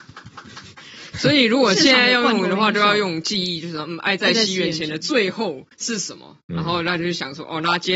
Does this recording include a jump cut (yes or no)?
yes